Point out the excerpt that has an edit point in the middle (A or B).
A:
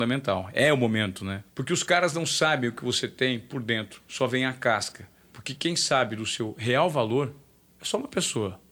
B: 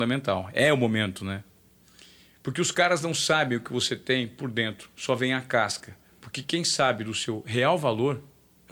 A